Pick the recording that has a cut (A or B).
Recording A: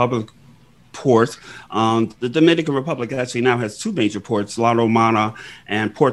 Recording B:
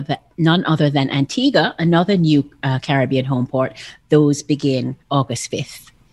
B